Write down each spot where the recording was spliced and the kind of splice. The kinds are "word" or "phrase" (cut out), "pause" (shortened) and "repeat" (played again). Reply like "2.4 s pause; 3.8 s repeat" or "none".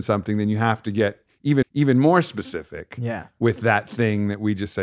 1.6 s repeat

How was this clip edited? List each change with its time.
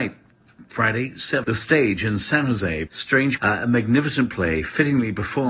1.4 s word; 2.9 s word; 3.4 s word

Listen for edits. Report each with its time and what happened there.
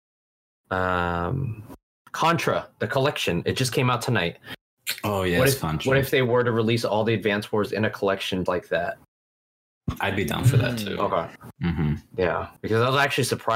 1.9 s pause; 8.5 s word; 12.6 s pause

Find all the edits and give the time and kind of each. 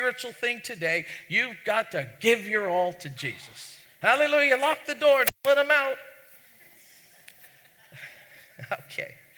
3.8 s pause

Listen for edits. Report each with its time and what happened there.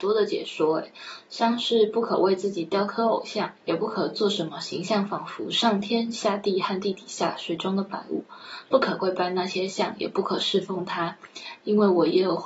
3.6 s pause

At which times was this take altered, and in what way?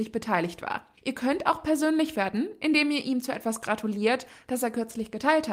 none

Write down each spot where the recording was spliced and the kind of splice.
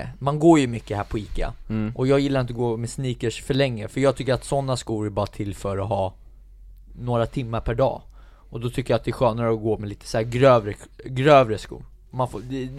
none

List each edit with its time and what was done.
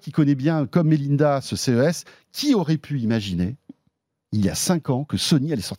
none

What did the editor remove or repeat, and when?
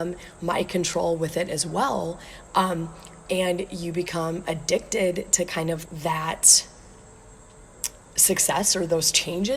5.8 s word

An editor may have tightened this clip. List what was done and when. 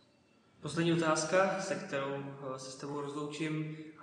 none

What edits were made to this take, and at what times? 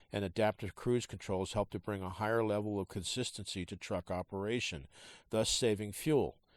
none

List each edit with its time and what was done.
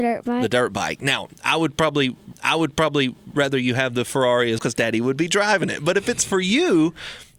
2.3 s repeat; 4.6 s word

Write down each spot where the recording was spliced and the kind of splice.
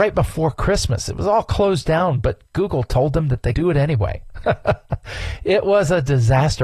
3.5 s word

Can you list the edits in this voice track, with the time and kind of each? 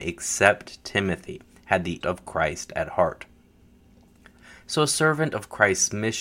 2.0 s word

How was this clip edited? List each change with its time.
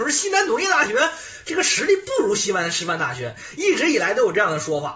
none

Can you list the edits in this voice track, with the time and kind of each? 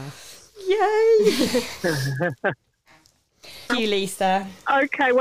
3.7 s word

